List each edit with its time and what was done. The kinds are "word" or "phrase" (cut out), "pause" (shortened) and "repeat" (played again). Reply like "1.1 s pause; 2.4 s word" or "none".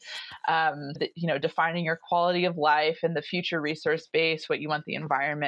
1.0 s word

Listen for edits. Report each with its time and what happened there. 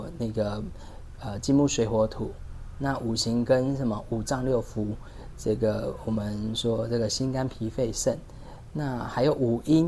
none

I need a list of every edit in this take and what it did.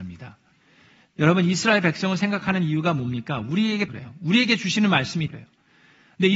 3.9 s phrase; 5.3 s word

